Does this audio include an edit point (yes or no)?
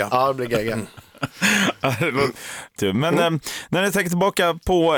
yes